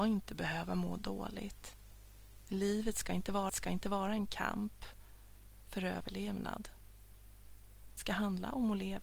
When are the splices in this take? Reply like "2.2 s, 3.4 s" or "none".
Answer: 3.5 s, 8.0 s